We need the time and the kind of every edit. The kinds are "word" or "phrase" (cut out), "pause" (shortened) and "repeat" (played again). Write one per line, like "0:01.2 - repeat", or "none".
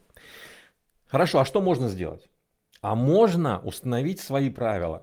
none